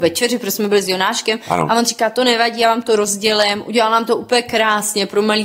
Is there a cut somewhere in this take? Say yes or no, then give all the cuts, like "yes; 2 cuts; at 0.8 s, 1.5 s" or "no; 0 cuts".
no; 0 cuts